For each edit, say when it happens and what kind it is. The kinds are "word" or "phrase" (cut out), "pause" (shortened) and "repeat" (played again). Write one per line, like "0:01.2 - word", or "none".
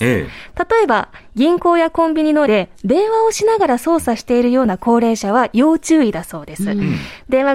0:02.5 - word